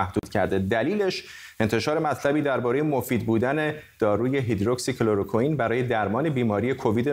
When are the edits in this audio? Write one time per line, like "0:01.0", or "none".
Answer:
none